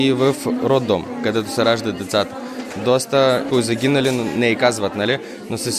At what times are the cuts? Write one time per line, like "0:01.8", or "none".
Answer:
0:03.5